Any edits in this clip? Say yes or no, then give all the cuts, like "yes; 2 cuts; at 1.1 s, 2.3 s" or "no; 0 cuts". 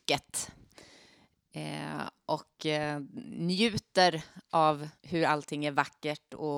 yes; 1 cut; at 5.0 s